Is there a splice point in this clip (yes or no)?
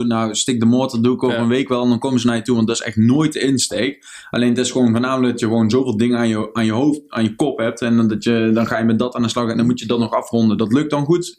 no